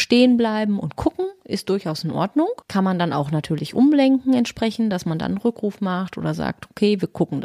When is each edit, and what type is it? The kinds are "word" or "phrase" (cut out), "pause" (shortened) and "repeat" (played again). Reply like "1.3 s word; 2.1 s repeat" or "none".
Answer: 2.6 s pause